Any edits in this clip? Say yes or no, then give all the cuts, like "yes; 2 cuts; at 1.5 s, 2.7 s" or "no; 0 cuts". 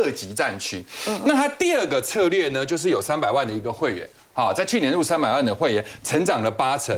no; 0 cuts